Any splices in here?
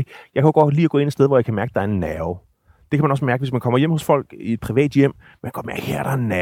no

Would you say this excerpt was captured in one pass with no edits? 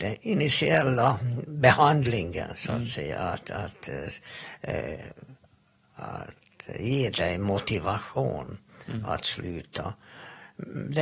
yes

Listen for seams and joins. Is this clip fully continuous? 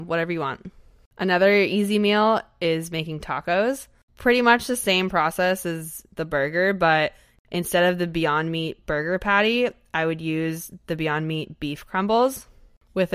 yes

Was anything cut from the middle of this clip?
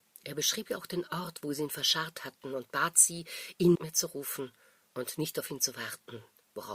yes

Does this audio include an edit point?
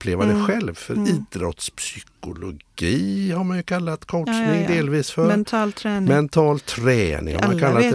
no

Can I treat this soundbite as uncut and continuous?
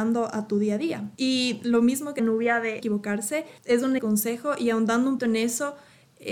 no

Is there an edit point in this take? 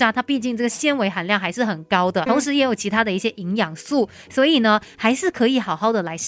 yes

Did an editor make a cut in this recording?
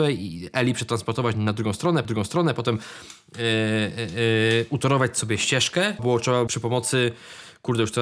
yes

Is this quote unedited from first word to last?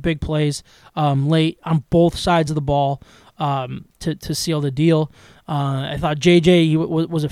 yes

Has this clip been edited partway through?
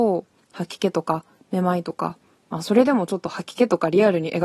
no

